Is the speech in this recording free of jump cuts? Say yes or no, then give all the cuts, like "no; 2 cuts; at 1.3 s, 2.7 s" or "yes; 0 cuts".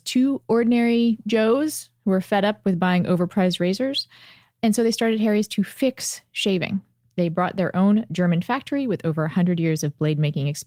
yes; 0 cuts